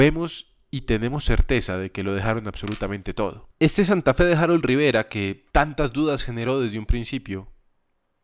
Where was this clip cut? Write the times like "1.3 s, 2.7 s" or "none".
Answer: 3.5 s, 5.5 s